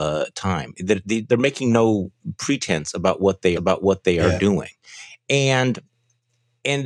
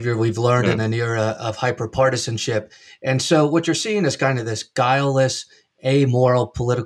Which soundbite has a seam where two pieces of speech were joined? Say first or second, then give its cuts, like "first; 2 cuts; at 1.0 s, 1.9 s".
first; 1 cut; at 3.5 s